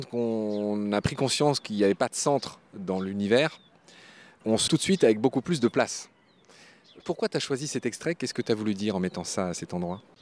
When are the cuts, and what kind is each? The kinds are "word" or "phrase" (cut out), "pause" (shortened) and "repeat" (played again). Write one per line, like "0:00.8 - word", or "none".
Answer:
0:04.7 - word